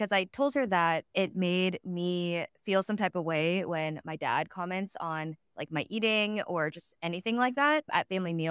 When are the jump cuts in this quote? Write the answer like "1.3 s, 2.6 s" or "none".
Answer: 1.1 s, 5.4 s